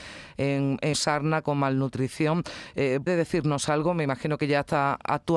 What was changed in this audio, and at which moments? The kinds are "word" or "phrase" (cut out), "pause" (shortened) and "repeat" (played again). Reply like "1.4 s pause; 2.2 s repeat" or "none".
0.9 s phrase; 3.1 s word